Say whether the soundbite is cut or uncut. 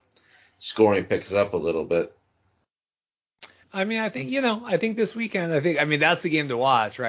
cut